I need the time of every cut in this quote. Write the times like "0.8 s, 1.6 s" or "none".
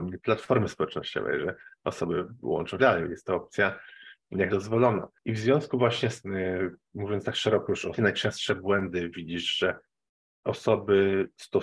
2.8 s, 4.5 s, 5.1 s, 6.2 s, 8.0 s